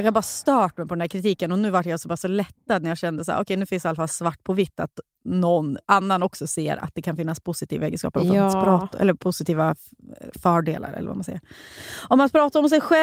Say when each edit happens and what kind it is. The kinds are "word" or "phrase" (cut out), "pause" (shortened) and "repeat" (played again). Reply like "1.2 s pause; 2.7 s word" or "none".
5.8 s pause